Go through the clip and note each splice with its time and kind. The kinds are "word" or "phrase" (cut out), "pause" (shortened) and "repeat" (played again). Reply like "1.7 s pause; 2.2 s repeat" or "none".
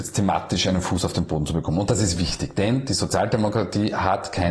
none